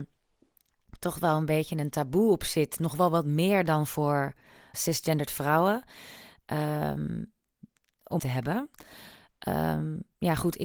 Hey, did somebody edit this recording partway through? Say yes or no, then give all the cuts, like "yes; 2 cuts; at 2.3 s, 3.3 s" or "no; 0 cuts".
yes; 2 cuts; at 4.7 s, 8.2 s